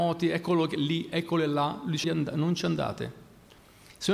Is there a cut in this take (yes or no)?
yes